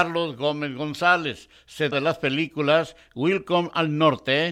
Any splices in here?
yes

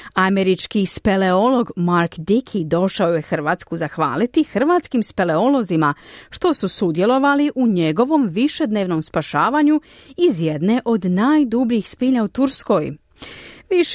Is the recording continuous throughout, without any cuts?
yes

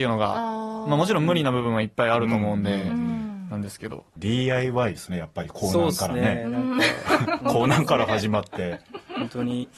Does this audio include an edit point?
no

